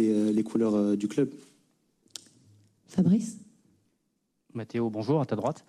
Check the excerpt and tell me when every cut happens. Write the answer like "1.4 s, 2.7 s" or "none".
none